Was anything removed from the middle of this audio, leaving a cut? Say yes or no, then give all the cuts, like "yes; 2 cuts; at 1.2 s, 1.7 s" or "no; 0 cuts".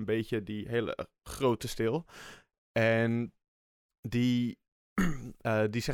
no; 0 cuts